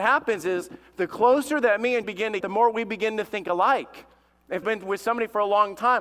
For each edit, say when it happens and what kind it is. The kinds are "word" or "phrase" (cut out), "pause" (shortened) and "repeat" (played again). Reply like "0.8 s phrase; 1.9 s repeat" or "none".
2.0 s word; 2.4 s word; 4.6 s word

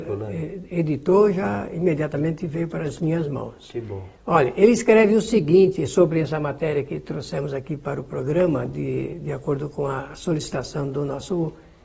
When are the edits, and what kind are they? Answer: none

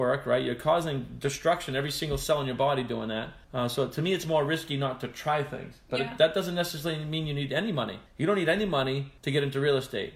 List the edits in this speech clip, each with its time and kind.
3.4 s pause; 8.1 s pause; 9.2 s pause

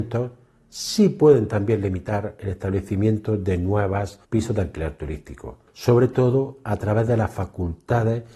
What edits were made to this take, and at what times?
4.2 s pause; 5.7 s pause

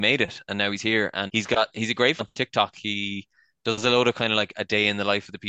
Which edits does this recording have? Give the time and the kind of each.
1.3 s word; 2.2 s word

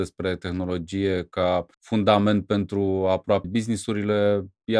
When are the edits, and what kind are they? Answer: 1.7 s pause; 3.4 s word

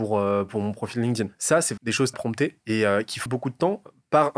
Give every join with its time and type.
1.8 s word; 2.1 s phrase; 3.3 s word

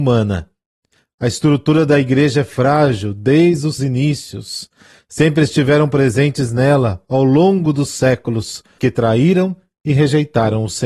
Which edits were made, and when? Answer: 3.8 s word; 8.8 s word

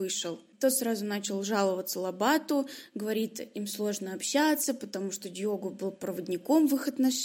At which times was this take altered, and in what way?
none

